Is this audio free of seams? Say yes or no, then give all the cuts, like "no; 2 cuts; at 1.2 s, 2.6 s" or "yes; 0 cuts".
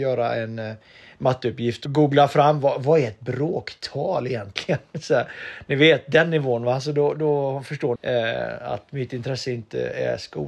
no; 2 cuts; at 1.9 s, 8.0 s